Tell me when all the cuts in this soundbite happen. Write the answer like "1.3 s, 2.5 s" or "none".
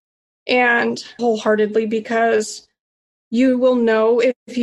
1.2 s